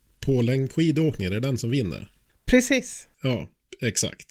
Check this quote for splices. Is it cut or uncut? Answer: uncut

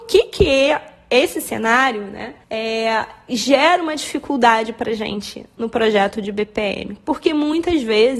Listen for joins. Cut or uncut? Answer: cut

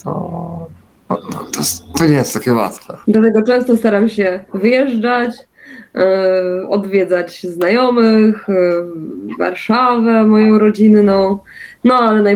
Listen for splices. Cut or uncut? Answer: cut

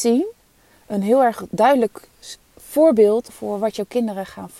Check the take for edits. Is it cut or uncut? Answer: cut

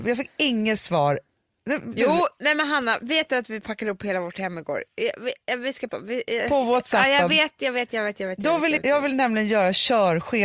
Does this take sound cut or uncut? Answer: cut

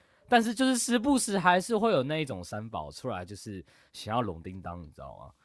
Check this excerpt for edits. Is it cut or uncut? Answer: uncut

